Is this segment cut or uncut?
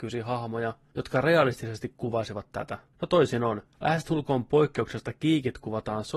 cut